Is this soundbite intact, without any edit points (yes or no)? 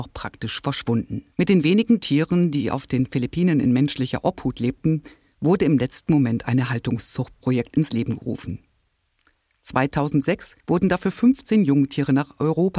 no